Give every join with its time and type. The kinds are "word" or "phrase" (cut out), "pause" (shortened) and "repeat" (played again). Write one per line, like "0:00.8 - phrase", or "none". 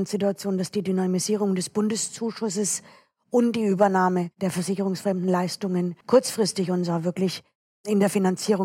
0:06.0 - pause